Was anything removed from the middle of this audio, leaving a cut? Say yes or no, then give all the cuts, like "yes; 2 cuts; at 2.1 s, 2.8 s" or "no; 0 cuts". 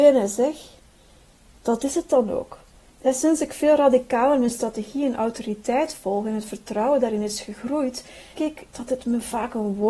yes; 1 cut; at 8.3 s